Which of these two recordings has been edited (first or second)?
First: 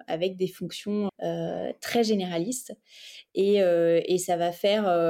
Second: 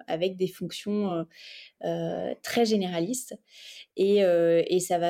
first